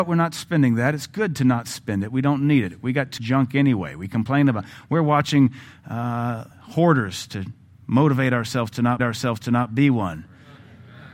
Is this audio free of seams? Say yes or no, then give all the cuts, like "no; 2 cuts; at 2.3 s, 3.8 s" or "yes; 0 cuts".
no; 3 cuts; at 3.2 s, 6.5 s, 9.0 s